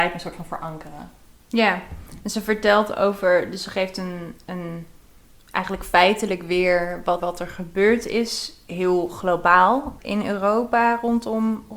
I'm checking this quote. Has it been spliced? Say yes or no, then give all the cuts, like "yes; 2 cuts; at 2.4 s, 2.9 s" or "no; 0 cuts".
yes; 2 cuts; at 7.2 s, 10.0 s